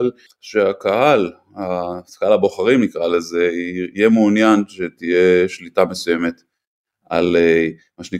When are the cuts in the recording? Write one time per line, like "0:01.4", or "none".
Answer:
none